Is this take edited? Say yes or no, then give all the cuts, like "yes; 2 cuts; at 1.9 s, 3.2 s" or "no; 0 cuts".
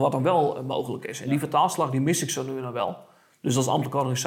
no; 0 cuts